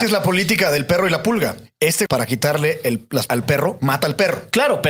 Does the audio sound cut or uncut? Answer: cut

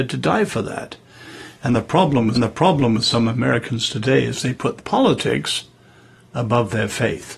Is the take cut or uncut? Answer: cut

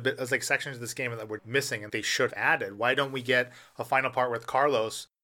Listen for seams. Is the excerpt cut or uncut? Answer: cut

